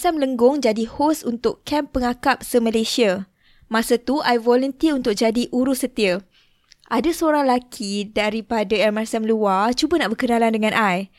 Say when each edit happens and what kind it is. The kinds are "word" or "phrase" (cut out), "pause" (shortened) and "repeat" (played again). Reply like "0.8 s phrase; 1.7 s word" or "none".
none